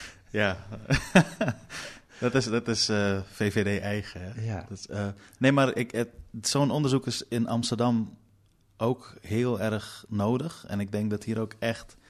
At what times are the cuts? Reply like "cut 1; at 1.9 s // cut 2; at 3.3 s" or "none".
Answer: none